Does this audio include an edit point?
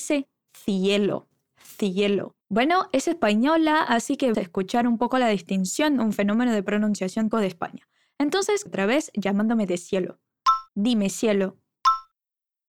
yes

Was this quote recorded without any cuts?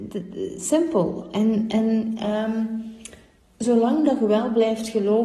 no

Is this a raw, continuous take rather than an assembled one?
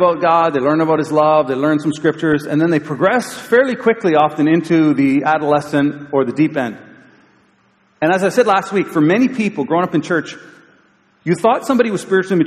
yes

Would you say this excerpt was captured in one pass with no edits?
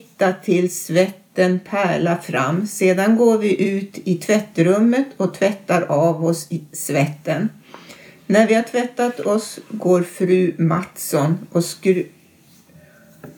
yes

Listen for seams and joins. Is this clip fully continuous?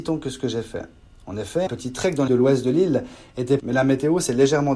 no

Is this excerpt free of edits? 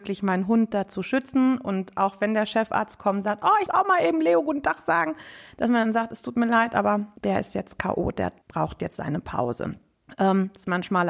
no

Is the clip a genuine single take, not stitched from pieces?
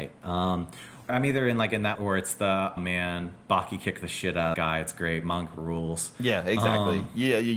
no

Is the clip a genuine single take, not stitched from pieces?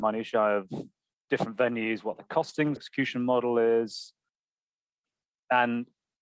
no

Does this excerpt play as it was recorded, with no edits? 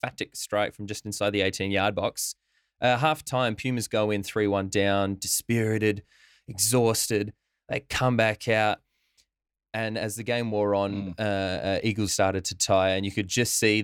no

